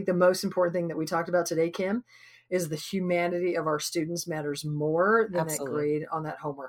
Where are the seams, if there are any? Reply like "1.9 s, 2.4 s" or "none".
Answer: none